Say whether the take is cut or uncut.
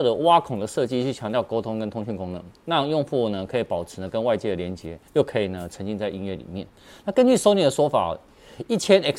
cut